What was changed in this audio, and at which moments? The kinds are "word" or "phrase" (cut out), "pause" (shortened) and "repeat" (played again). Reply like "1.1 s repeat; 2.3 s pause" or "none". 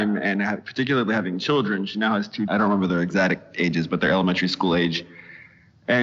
2.5 s phrase